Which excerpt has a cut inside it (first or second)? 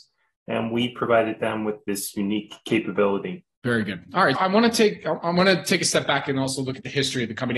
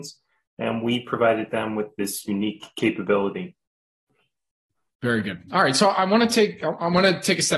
first